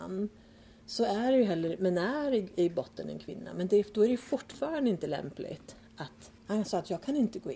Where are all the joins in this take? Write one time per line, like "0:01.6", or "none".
0:01.8
0:06.4